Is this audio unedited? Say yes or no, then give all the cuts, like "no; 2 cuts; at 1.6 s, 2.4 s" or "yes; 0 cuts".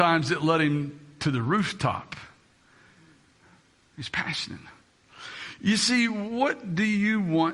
yes; 0 cuts